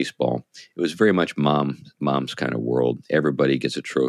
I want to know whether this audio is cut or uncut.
uncut